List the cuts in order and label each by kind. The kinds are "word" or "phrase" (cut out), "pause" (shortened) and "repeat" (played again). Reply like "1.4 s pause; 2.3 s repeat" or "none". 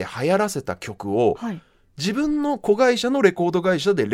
none